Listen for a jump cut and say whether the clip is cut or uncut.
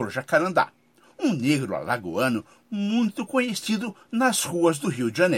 uncut